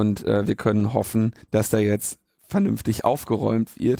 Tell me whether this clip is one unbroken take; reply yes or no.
no